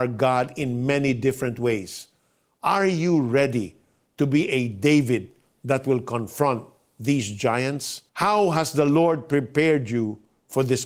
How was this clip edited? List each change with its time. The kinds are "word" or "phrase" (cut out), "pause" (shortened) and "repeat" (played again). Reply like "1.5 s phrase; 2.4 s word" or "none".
8.1 s pause